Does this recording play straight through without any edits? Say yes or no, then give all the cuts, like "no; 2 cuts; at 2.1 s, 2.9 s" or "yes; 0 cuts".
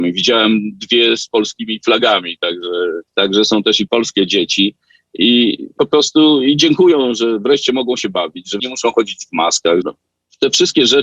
no; 5 cuts; at 3.1 s, 3.9 s, 5.8 s, 8.6 s, 9.8 s